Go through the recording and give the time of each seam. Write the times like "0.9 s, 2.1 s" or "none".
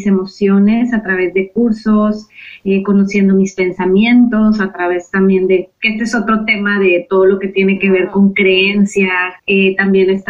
9.4 s